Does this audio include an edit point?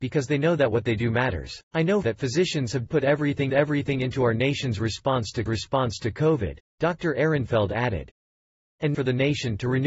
yes; 6 cuts; at 1.7 s, 2.0 s, 2.9 s, 3.5 s, 5.5 s, 8.9 s

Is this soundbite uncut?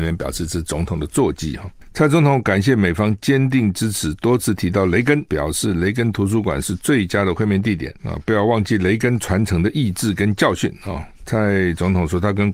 no; 3 cuts; at 5.3 s, 8.0 s, 11.1 s

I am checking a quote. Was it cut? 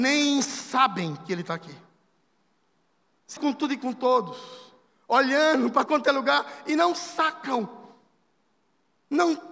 yes; 2 cuts; at 3.4 s, 5.9 s

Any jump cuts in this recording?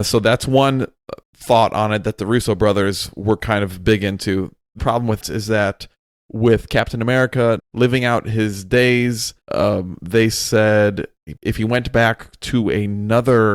yes; 6 cuts; at 1.2 s, 4.8 s, 5.2 s, 7.6 s, 9.4 s, 11.4 s

